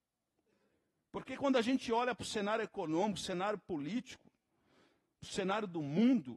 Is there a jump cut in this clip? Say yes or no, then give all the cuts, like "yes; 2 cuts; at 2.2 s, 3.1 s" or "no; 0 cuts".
no; 0 cuts